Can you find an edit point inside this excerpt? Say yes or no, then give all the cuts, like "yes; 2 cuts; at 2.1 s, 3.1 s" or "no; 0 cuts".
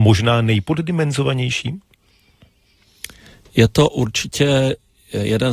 no; 0 cuts